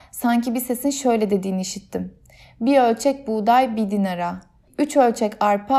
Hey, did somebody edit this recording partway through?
no; 0 cuts

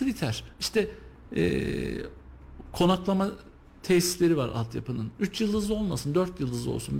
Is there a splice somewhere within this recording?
no; 0 cuts

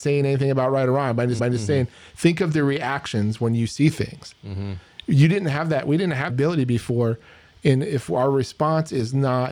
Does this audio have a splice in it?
yes; 2 cuts; at 1.4 s, 6.3 s

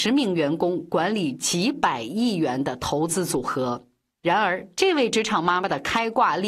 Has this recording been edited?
no; 0 cuts

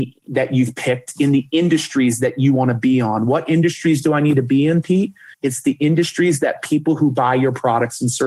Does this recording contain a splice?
yes; 1 cut; at 5.3 s

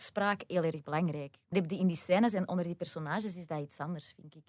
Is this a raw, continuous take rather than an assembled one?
no; 1 cut; at 1.5 s

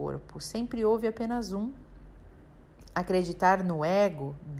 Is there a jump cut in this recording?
no; 0 cuts

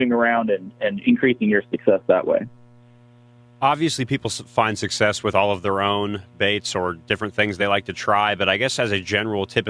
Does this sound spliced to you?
no; 0 cuts

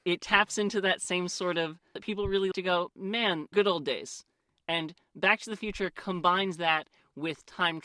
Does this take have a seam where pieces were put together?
yes; 3 cuts; at 2.0 s, 2.5 s, 3.5 s

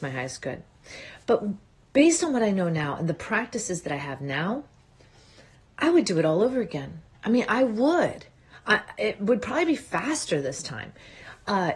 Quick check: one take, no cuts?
yes; 0 cuts

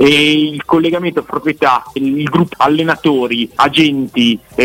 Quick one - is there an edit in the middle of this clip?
yes; 4 cuts; at 1.3 s, 2.0 s, 2.5 s, 3.6 s

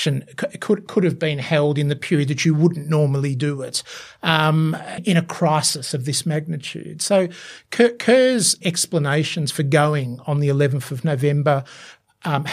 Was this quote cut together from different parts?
yes; 2 cuts; at 5.0 s, 8.6 s

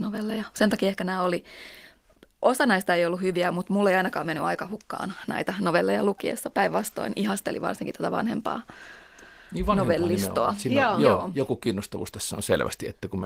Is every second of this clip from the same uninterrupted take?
yes; 0 cuts

